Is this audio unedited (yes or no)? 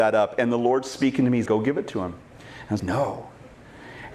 no